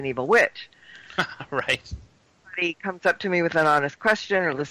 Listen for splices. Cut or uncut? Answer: uncut